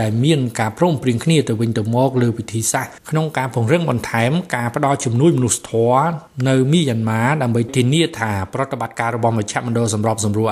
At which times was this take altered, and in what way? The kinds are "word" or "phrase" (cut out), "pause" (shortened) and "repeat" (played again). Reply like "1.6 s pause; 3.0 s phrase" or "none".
3.0 s pause